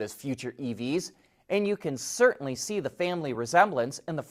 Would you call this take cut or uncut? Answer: uncut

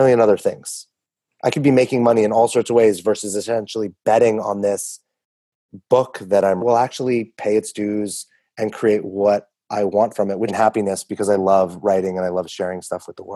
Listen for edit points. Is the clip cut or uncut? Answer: cut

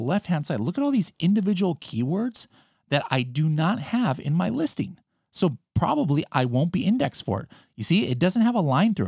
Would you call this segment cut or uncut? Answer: uncut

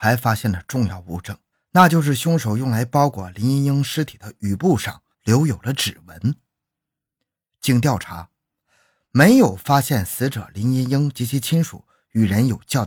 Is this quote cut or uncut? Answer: cut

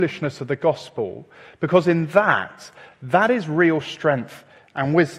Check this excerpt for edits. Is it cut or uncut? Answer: uncut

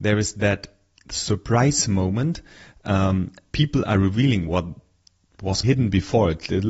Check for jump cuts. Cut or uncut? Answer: cut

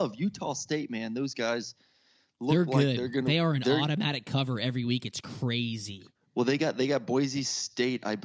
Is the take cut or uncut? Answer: uncut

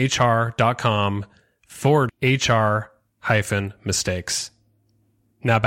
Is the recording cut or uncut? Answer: cut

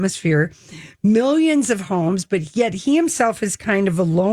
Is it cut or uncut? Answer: uncut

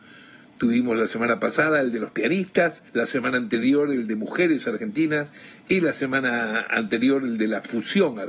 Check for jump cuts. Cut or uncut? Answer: cut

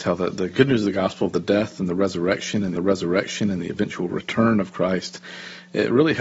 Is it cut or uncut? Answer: cut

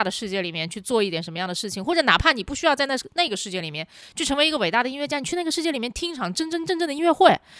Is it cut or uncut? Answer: uncut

